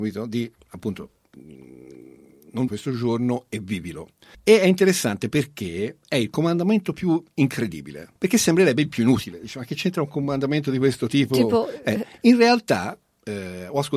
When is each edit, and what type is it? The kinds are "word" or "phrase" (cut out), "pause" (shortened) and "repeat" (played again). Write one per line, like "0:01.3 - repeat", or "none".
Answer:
0:02.7 - word
0:04.3 - pause
0:08.2 - pause